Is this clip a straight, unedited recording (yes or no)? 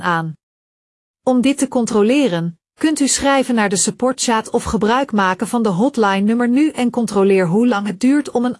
yes